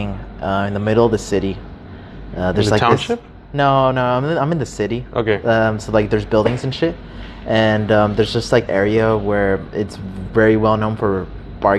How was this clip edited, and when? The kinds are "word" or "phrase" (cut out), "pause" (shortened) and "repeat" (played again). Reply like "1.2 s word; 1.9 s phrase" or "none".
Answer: 8.7 s word